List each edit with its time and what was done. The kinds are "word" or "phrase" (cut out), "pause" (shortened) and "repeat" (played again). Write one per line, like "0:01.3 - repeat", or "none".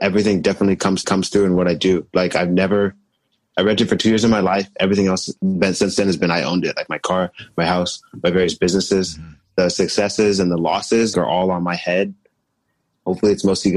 0:01.0 - repeat
0:05.4 - pause
0:11.1 - word